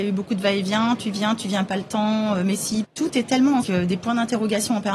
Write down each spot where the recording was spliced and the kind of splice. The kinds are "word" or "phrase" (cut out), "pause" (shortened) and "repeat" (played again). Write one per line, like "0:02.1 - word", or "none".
0:01.7 - phrase
0:02.8 - word
0:03.6 - phrase